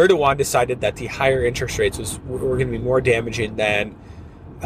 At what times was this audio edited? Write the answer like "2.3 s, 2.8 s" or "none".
none